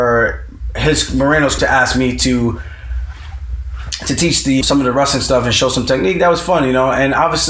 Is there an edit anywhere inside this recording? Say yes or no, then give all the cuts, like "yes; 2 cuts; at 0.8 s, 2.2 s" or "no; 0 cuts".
yes; 2 cuts; at 1.6 s, 4.6 s